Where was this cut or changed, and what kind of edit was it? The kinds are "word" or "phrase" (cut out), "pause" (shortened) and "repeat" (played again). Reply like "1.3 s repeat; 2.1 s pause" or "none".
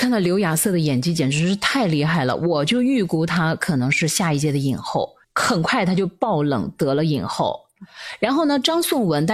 5.2 s pause